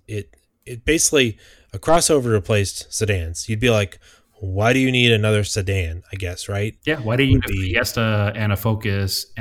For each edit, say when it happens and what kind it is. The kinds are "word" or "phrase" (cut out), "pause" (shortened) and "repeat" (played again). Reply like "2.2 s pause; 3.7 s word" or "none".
none